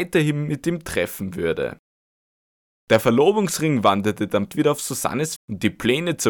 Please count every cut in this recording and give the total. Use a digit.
2